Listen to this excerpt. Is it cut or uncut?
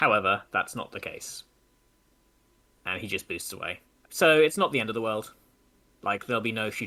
uncut